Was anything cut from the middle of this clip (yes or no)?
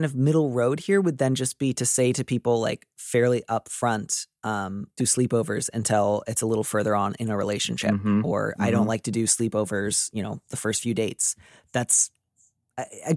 yes